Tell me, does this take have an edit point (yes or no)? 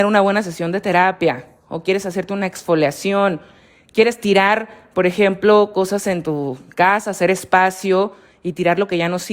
no